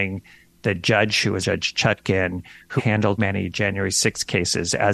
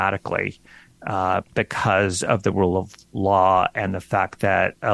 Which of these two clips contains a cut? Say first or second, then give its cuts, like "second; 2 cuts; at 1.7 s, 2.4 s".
first; 3 cuts; at 1.4 s, 2.8 s, 3.2 s